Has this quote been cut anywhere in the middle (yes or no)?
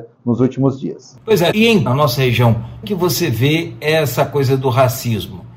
yes